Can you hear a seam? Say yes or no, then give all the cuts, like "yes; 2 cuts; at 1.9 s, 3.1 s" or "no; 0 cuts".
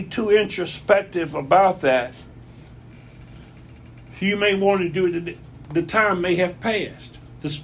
no; 0 cuts